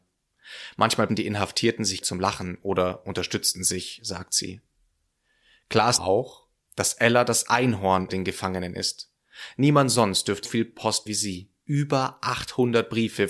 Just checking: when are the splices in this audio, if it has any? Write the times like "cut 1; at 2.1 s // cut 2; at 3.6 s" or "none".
cut 1; at 1.1 s // cut 2; at 2.0 s // cut 3; at 6.0 s // cut 4; at 8.1 s // cut 5; at 10.4 s // cut 6; at 11.1 s